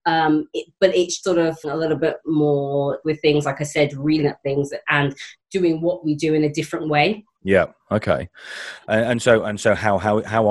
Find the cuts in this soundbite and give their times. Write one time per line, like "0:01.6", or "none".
0:01.2
0:01.6
0:03.0
0:04.2

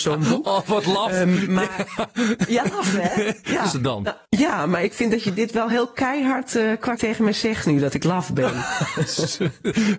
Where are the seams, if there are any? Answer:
0:03.7
0:04.2
0:07.0

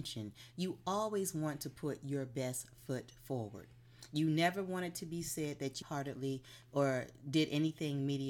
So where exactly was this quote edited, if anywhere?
0:05.8

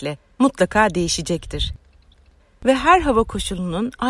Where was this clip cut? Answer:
none

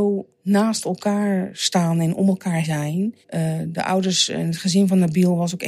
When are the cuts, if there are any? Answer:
0:02.6
0:03.2

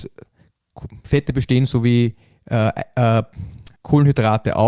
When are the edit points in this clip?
0:01.0
0:03.8

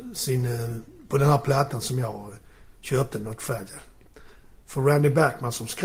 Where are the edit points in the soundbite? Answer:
none

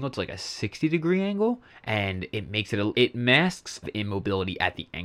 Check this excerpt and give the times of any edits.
0:01.7
0:02.9
0:03.8

